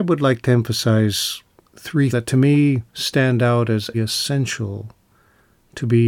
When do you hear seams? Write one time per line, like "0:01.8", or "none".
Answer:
0:02.1
0:02.9
0:03.9